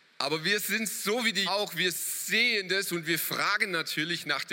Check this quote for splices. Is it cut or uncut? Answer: cut